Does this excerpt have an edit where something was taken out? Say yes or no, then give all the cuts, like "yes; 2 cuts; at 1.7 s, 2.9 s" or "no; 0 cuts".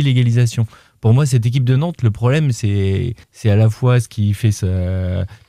yes; 1 cut; at 3.2 s